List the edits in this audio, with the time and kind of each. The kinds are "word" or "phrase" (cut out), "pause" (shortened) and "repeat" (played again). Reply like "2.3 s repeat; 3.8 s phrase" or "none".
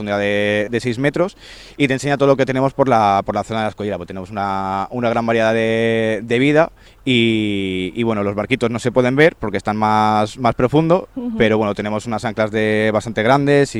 6.9 s pause